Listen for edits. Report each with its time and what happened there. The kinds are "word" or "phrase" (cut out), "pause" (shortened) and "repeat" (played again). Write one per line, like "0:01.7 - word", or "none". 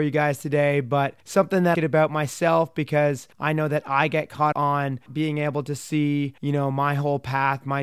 0:01.2 - pause
0:01.7 - phrase
0:03.3 - pause
0:04.5 - word
0:05.1 - word
0:06.4 - pause

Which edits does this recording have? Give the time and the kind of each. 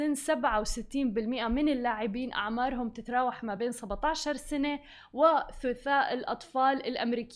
none

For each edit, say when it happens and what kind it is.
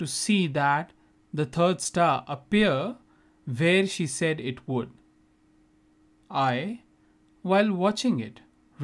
none

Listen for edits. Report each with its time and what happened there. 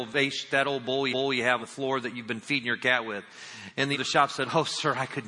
0:01.1 - repeat
0:01.6 - word
0:03.9 - word

